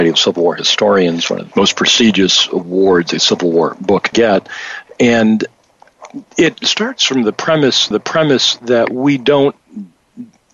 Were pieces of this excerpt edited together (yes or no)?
yes